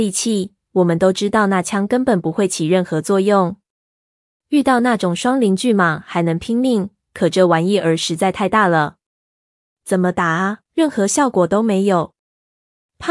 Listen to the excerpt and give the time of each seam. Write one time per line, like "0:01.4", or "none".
0:10.6